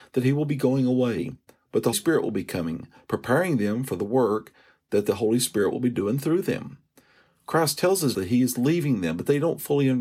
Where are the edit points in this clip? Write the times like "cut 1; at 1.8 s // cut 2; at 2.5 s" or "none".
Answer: cut 1; at 1.9 s // cut 2; at 8.1 s